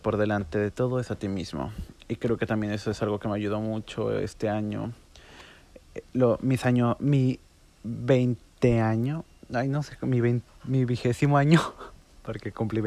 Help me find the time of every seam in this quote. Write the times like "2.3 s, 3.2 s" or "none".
none

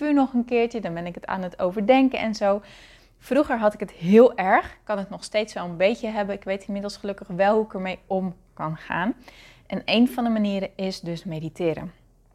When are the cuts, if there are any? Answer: none

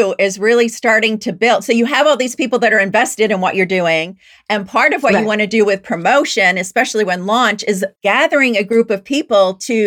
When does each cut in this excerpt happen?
8.0 s

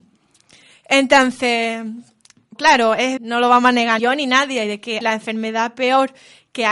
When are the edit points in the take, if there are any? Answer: 2.6 s, 3.2 s, 4.0 s, 5.0 s

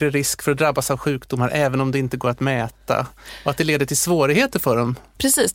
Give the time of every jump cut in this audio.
none

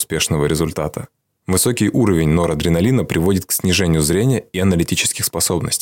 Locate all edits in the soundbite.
1.2 s

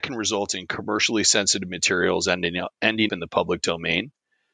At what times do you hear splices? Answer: 3.1 s

